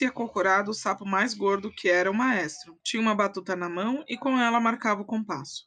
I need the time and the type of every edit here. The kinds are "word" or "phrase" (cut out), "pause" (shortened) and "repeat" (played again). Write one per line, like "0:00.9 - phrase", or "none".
0:02.8 - pause